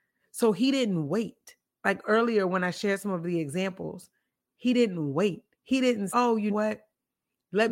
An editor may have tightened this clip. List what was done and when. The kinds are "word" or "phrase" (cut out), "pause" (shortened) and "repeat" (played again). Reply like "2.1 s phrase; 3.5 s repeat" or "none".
5.5 s pause; 6.1 s word; 6.5 s word